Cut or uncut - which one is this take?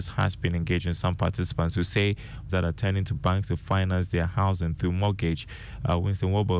cut